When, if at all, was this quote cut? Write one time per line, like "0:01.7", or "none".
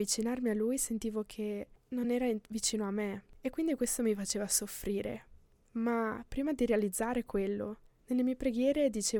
none